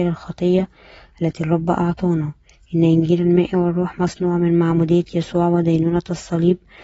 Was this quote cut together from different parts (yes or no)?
no